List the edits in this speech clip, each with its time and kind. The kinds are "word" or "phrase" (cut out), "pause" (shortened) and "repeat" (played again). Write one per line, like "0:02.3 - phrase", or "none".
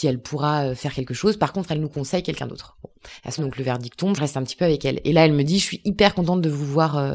0:03.4 - word
0:04.2 - phrase